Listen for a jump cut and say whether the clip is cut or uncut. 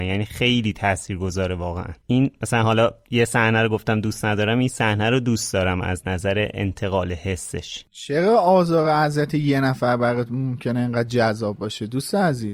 uncut